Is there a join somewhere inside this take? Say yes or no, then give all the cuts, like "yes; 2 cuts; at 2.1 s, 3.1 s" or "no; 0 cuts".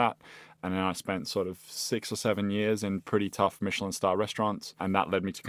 no; 0 cuts